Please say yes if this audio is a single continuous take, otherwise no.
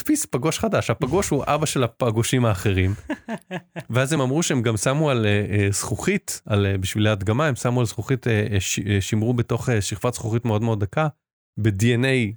yes